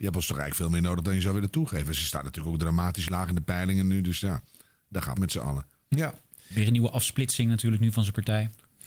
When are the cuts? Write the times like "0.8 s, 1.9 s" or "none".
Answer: 5.2 s